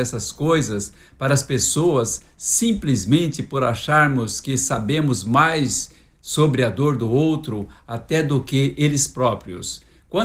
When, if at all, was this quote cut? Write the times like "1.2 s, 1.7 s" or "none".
none